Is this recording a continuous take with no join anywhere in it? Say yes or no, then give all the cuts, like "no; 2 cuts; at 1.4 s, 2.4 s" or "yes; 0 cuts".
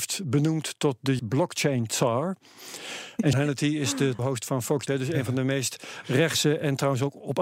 no; 4 cuts; at 1.2 s, 3.3 s, 4.2 s, 4.9 s